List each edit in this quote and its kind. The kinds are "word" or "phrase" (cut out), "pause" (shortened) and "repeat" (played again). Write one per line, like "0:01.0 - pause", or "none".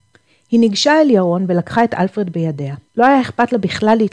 0:02.9 - pause